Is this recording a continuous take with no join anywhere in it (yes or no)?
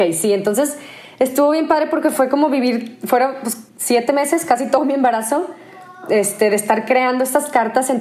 no